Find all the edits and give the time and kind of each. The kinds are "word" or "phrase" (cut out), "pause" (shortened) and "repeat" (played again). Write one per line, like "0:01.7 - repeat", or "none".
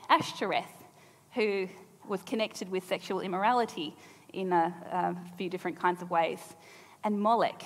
0:02.0 - word